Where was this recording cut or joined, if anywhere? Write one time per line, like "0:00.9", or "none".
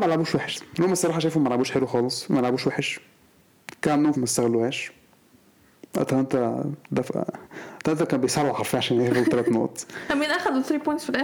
0:04.1
0:06.8